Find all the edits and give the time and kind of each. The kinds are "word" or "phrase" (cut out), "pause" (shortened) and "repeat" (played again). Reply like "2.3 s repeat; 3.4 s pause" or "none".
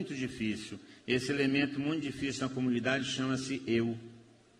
none